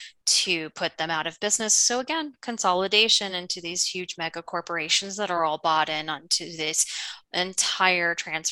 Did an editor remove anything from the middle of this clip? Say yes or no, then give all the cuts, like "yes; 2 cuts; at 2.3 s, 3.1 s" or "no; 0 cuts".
no; 0 cuts